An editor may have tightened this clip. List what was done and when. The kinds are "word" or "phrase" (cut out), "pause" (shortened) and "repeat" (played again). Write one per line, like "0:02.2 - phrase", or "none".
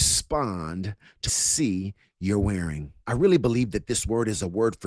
0:01.3 - phrase
0:03.0 - pause